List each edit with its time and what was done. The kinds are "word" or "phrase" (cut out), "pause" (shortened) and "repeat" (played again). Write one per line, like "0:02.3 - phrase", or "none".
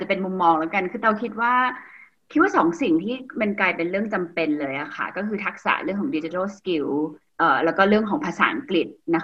none

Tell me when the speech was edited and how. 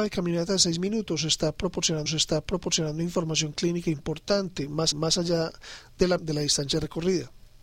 0:02.1 - repeat
0:04.9 - repeat
0:06.2 - word

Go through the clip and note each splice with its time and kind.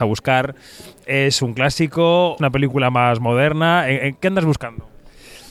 0:02.4 - phrase

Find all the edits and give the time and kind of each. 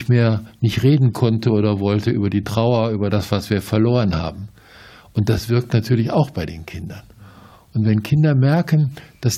none

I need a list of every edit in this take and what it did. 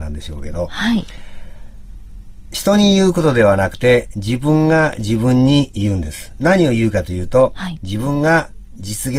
none

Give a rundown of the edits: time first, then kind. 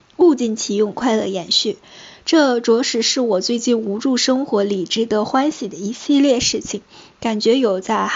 none

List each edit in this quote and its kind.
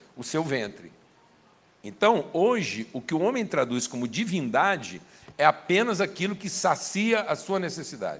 0:01.3 - pause

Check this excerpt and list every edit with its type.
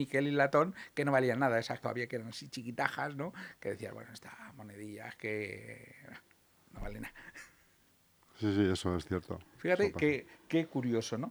0:01.8 - phrase

